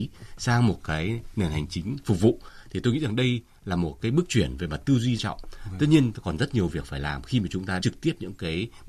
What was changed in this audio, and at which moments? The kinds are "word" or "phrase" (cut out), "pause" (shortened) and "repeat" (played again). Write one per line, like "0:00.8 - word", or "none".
0:05.2 - phrase
0:07.8 - word